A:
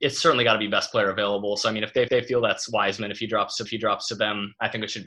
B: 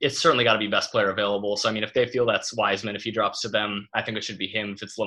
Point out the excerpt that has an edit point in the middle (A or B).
A